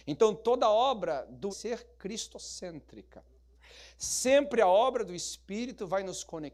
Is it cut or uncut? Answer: cut